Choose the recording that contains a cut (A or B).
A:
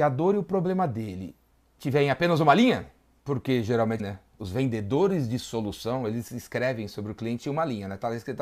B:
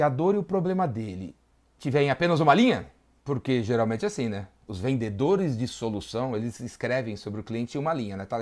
A